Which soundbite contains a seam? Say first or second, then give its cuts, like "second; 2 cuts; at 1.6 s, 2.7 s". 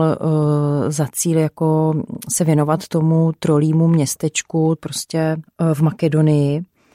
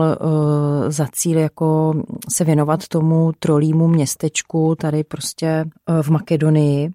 first; 1 cut; at 4.8 s